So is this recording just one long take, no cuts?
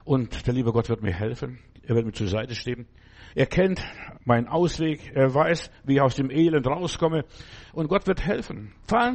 no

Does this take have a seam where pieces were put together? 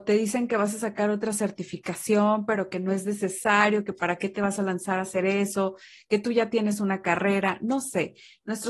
no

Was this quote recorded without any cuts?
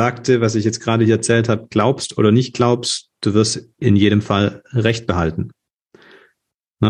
yes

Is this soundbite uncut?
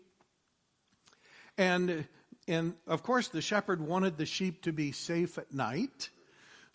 yes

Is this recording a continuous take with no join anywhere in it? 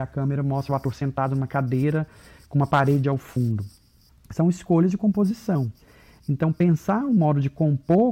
yes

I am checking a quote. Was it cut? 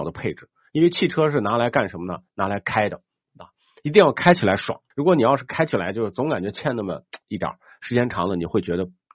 yes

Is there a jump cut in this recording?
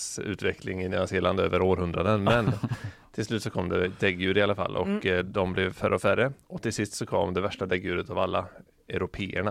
no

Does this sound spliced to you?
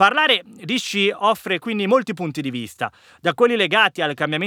no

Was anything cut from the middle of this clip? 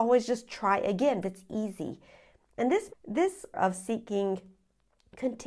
yes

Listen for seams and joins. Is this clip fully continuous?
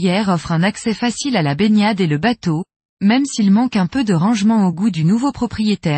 yes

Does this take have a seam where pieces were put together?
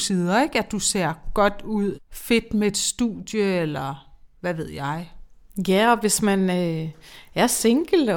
yes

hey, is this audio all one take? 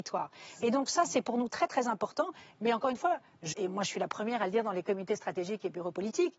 no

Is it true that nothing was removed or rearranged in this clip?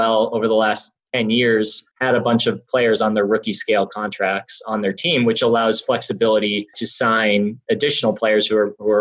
no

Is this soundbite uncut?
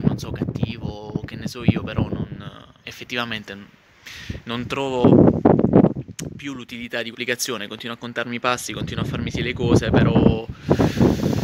no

